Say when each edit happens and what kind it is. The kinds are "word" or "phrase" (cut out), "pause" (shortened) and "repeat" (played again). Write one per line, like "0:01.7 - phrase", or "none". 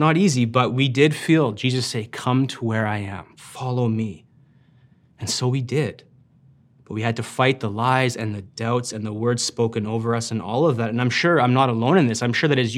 none